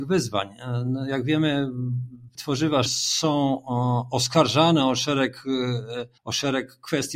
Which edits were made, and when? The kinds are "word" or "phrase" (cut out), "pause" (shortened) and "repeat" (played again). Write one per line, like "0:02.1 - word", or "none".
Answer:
0:02.8 - word
0:06.2 - pause